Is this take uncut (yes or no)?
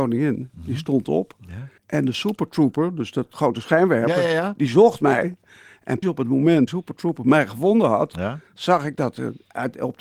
no